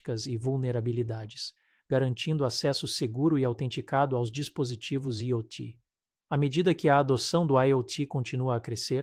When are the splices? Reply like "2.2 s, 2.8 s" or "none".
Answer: none